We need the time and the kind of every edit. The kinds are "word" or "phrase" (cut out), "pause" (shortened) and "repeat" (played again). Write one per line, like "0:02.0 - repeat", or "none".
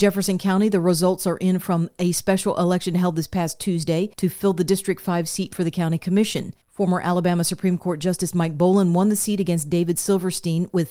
0:06.6 - pause

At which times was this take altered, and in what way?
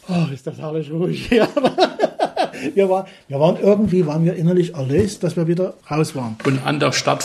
0:05.8 - pause

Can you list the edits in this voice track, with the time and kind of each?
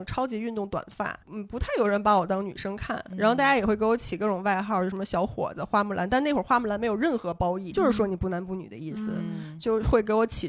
0:01.2 - phrase
0:07.7 - word

